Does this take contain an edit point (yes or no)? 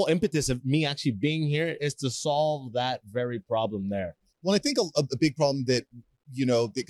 no